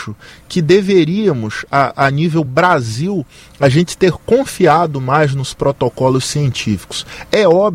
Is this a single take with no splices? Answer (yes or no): yes